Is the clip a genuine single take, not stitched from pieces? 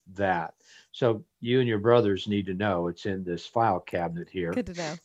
yes; 0 cuts

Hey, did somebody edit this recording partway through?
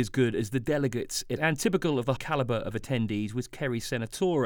yes; 2 cuts; at 1.4 s, 2.2 s

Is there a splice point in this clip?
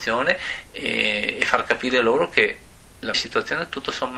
yes; 1 cut; at 3.1 s

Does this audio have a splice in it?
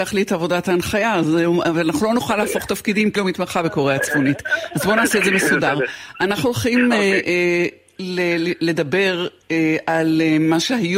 yes; 1 cut; at 3.2 s

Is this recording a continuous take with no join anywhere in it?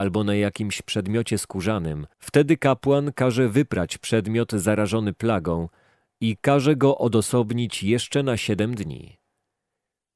no; 1 cut; at 2.1 s

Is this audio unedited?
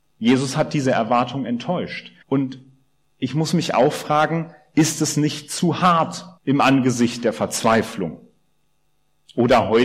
no; 2 cuts; at 2.2 s, 6.4 s

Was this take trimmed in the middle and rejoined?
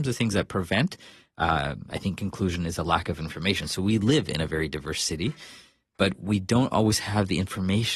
no; 0 cuts

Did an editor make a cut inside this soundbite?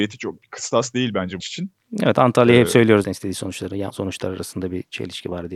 yes; 3 cuts; at 1.4 s, 3.0 s, 3.9 s

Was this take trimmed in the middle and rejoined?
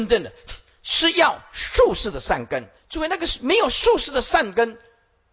yes; 1 cut; at 2.8 s

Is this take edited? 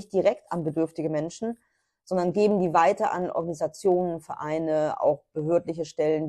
no; 0 cuts

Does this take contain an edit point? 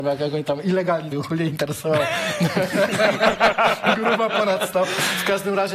yes; 1 cut; at 1.1 s

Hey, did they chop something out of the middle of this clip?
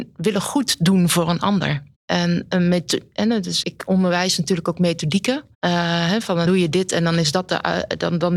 yes; 4 cuts; at 1.9 s, 3.6 s, 5.5 s, 6.4 s

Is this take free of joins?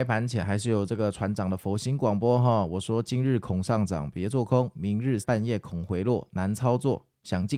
no; 1 cut; at 5.2 s

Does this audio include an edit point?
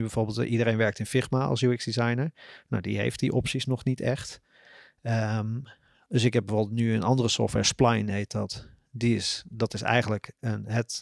no; 0 cuts

